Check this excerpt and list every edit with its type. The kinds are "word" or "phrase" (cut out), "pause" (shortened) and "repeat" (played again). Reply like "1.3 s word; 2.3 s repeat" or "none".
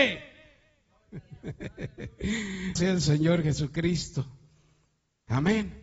2.8 s word